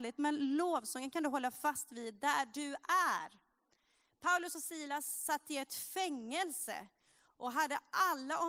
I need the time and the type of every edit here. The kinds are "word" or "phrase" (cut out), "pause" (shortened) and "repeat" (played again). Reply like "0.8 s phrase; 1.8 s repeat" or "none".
none